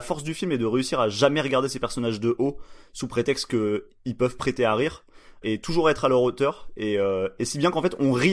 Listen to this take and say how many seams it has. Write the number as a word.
one